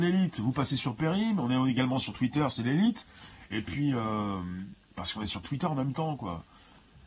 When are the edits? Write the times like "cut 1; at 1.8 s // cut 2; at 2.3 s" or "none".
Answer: cut 1; at 4.8 s // cut 2; at 5.4 s